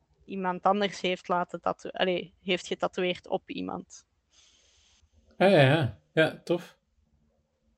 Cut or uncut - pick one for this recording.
uncut